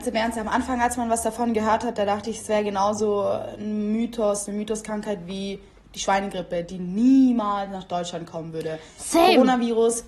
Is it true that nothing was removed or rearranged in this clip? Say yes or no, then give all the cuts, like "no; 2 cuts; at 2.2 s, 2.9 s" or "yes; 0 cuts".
yes; 0 cuts